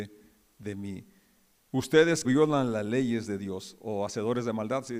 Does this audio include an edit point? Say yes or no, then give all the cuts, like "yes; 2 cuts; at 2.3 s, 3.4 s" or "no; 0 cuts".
yes; 1 cut; at 2.2 s